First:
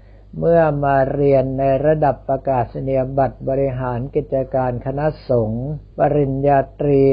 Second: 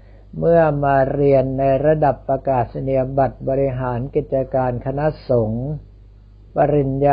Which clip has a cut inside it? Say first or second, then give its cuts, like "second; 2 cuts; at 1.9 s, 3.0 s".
first; 1 cut; at 5.9 s